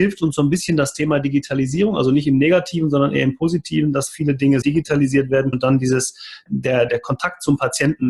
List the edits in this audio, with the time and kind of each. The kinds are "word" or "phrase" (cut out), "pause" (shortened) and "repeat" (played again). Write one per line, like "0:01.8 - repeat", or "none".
0:04.6 - word
0:05.5 - word
0:06.5 - word
0:06.9 - word